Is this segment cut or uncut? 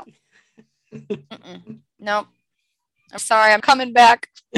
cut